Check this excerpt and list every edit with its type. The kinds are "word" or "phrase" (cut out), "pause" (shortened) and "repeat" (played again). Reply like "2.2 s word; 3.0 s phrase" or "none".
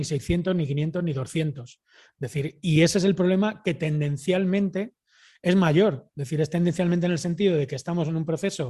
none